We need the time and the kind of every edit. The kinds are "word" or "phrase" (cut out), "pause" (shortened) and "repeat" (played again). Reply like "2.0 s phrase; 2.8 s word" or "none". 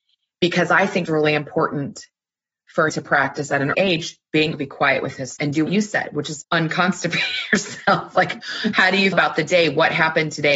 1.0 s word; 2.9 s word; 3.7 s word; 4.5 s word; 5.4 s word; 5.7 s word; 6.4 s word; 9.1 s word